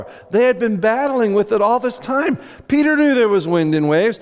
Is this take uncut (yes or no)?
yes